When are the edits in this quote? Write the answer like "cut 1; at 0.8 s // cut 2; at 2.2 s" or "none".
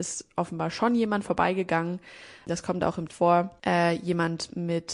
cut 1; at 3.1 s